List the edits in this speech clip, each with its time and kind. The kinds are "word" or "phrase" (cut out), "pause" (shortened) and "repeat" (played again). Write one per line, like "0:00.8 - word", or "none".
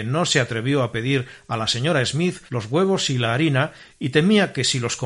0:02.5 - pause